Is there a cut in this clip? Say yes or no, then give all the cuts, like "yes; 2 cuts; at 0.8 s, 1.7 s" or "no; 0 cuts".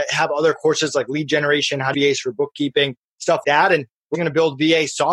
yes; 3 cuts; at 1.9 s, 3.4 s, 4.1 s